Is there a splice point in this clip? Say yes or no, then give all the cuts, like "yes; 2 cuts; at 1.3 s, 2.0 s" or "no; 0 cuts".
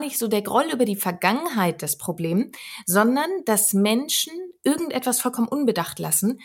no; 0 cuts